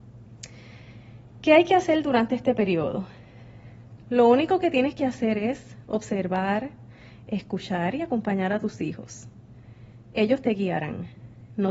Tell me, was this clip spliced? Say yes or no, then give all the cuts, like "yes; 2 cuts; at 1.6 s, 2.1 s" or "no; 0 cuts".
no; 0 cuts